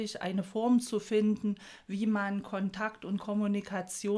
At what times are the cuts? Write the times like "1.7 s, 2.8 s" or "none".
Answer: none